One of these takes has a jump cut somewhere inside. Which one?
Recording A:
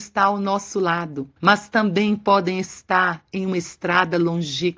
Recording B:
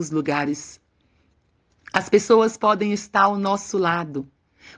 A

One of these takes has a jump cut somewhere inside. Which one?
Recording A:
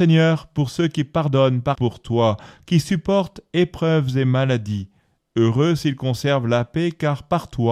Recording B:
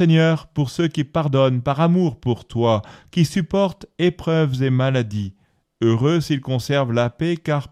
A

